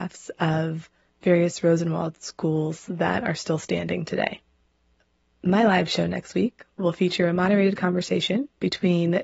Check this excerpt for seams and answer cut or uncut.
uncut